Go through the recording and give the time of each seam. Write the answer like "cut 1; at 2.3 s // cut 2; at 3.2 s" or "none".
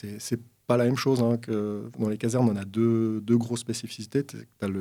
none